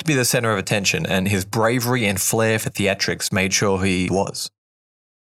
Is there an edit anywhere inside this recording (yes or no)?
yes